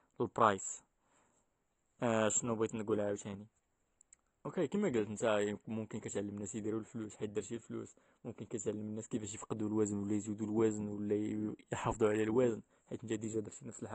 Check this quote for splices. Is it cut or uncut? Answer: uncut